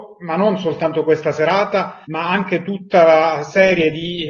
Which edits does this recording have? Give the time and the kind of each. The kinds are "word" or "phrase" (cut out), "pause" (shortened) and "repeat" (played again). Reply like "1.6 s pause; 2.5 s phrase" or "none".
2.0 s pause